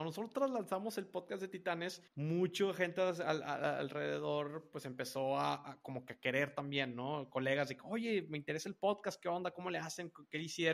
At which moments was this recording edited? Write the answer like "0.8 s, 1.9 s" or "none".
2.1 s